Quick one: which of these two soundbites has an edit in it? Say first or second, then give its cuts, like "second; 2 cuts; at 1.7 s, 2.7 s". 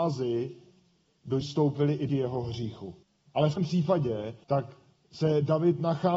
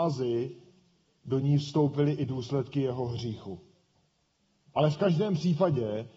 first; 5 cuts; at 1.4 s, 2.1 s, 3.0 s, 3.6 s, 4.4 s